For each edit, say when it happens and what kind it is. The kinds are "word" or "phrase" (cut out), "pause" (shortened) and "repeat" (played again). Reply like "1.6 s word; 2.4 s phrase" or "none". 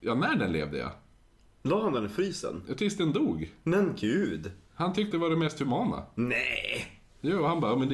5.1 s word